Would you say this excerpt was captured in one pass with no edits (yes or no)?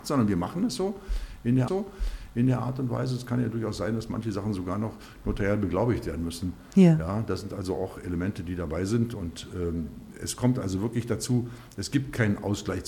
no